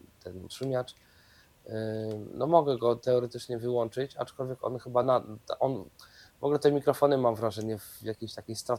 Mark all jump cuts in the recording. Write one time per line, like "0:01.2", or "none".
none